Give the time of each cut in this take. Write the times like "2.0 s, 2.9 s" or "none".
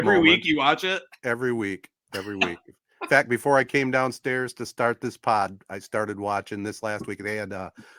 none